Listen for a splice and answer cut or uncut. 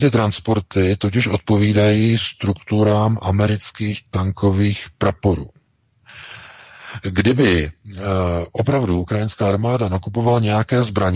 uncut